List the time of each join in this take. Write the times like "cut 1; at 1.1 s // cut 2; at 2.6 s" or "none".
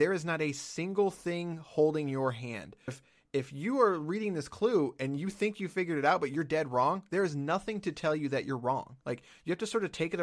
cut 1; at 2.9 s // cut 2; at 9.0 s